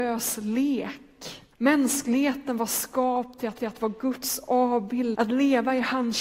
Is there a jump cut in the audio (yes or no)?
yes